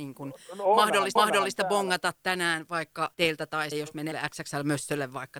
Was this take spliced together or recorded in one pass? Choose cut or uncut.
cut